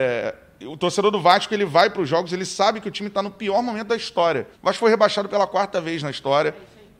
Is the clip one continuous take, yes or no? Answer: no